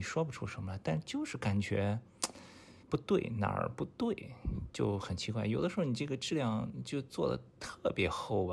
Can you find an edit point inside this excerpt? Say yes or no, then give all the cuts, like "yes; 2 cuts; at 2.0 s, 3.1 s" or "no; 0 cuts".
yes; 2 cuts; at 2.8 s, 7.5 s